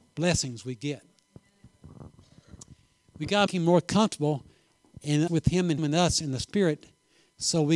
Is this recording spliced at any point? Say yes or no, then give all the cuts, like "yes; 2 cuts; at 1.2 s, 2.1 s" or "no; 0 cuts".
yes; 3 cuts; at 3.5 s, 5.3 s, 5.8 s